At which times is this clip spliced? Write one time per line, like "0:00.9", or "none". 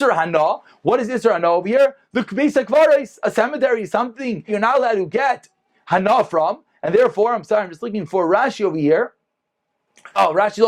0:04.5